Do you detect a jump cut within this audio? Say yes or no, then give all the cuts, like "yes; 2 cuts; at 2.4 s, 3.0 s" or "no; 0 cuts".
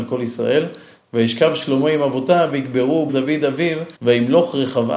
yes; 2 cuts; at 3.1 s, 3.9 s